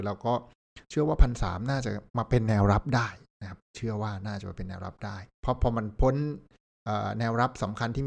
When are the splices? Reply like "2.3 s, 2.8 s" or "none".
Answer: 2.1 s, 5.3 s